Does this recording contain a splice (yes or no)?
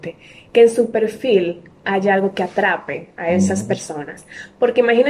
no